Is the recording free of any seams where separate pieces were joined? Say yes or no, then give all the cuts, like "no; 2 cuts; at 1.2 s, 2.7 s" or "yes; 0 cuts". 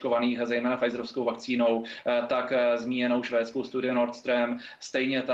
yes; 0 cuts